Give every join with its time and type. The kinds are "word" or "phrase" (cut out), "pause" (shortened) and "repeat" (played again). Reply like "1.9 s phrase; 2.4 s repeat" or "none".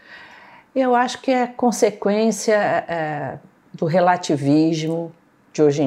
none